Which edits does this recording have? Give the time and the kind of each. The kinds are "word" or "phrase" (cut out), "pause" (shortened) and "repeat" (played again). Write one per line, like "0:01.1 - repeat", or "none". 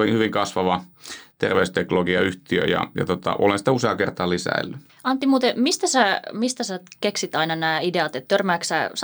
none

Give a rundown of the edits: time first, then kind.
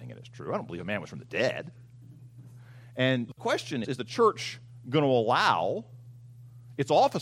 0:01.1 - word
0:03.3 - word
0:03.8 - word

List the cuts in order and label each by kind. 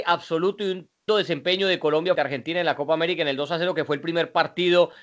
0:01.1 - word
0:02.2 - word

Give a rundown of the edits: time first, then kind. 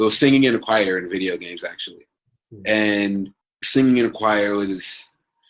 0:03.4 - pause

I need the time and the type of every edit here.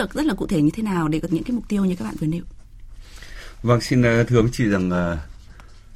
0:01.3 - phrase

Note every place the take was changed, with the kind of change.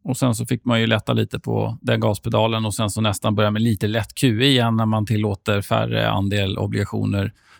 none

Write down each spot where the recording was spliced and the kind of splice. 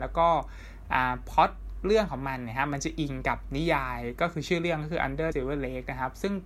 0:05.3 - word

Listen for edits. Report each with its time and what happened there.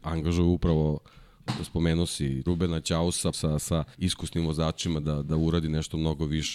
0:02.5 - phrase
0:03.3 - phrase
0:03.9 - pause
0:05.0 - word

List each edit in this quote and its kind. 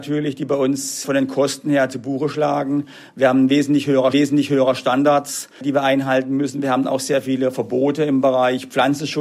0:04.1 - repeat

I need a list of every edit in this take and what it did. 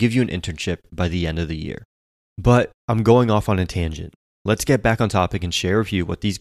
none

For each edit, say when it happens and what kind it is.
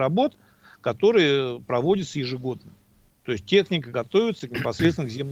none

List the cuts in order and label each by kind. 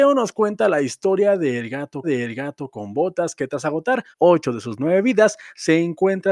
0:02.0 - repeat
0:04.1 - pause

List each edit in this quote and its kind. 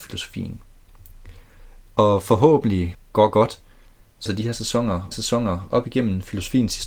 0:02.9 - phrase
0:04.3 - phrase
0:05.1 - repeat

